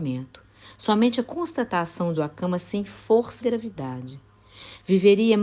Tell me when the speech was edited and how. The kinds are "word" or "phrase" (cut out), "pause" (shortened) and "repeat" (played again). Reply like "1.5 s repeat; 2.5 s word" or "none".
2.2 s phrase; 3.4 s word